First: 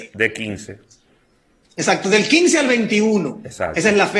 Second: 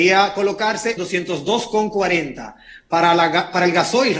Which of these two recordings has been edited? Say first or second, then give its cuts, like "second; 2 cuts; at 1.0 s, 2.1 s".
second; 1 cut; at 1.0 s